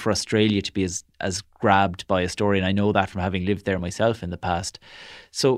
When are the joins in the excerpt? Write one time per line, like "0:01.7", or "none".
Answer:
none